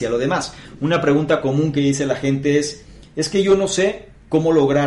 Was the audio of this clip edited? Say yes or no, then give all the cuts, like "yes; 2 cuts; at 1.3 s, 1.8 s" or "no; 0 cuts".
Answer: no; 0 cuts